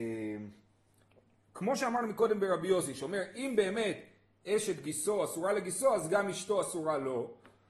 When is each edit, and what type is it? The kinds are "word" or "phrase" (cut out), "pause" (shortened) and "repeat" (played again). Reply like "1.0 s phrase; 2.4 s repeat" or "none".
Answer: none